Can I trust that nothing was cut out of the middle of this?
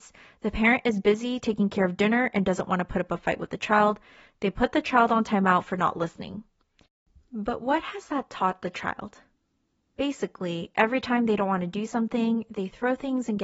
yes; 0 cuts

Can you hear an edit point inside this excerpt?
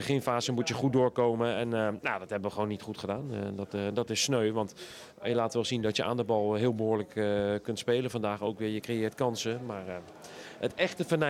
no; 0 cuts

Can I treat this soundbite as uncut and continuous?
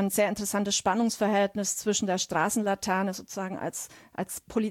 yes; 0 cuts

